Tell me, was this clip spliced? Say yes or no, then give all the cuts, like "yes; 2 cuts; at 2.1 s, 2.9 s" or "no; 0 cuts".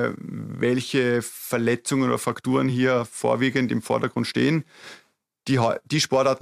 no; 0 cuts